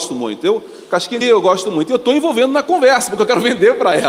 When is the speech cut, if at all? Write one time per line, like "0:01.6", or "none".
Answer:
0:01.2